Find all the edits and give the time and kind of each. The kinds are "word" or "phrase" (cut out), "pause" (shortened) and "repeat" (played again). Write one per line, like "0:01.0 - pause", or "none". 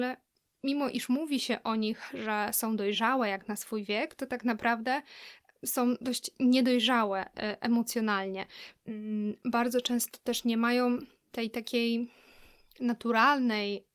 none